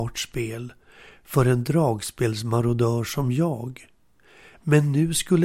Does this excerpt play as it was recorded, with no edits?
yes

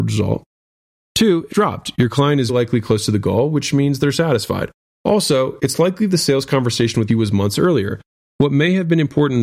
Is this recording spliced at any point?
yes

